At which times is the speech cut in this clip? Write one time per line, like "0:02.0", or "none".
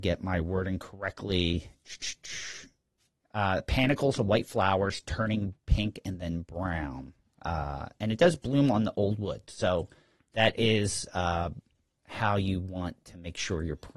none